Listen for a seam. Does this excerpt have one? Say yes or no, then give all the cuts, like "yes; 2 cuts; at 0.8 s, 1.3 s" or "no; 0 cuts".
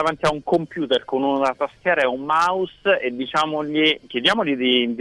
no; 0 cuts